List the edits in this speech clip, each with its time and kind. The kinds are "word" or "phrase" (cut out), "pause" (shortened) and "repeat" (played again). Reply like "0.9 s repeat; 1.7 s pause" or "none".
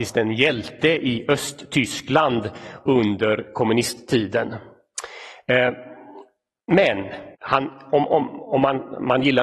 7.3 s pause